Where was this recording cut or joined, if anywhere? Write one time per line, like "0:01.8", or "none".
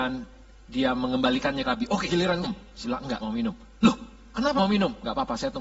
0:01.6
0:02.1
0:02.4
0:02.8
0:03.2
0:04.6